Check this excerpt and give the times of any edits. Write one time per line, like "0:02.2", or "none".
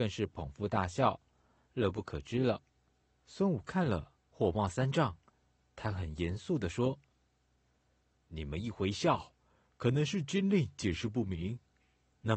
none

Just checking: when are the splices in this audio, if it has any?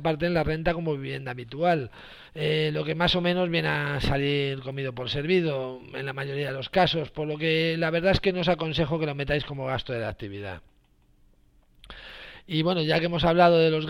0:02.3

